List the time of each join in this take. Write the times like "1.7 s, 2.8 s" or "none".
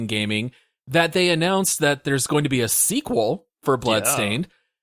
none